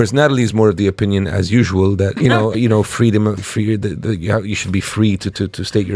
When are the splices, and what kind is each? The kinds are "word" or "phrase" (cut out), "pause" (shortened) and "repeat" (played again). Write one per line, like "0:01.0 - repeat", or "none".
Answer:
0:02.2 - word
0:02.5 - word
0:03.4 - word